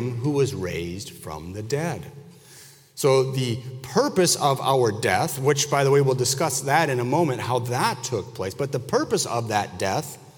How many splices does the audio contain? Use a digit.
0